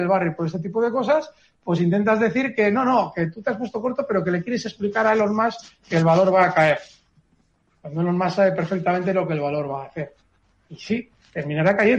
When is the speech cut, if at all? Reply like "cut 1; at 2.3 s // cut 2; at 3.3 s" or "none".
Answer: none